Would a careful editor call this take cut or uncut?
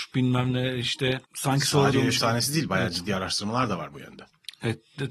cut